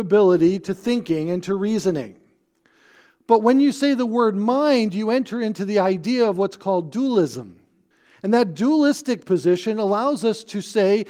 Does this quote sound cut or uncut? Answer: cut